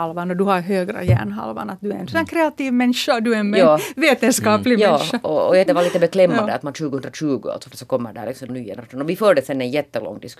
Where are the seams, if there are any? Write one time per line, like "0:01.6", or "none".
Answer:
0:05.7
0:07.7
0:08.5